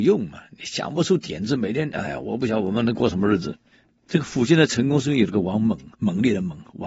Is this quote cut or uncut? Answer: cut